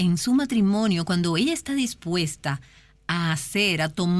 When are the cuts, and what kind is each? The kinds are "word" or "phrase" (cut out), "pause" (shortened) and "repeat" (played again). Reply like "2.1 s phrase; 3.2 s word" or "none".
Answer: none